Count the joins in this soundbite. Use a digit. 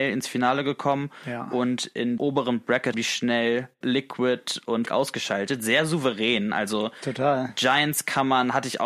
4